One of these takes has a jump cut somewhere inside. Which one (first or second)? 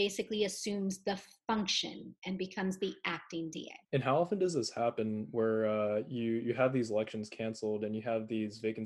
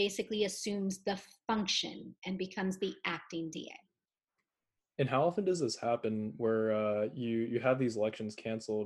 first